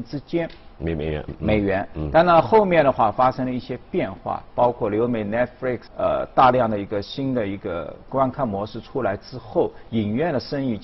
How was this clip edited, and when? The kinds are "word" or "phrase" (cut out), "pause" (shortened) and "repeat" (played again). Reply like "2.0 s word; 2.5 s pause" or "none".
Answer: 1.3 s word; 5.9 s phrase